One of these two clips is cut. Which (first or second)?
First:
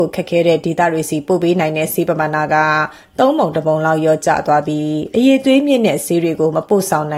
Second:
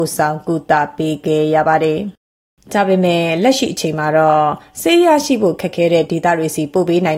second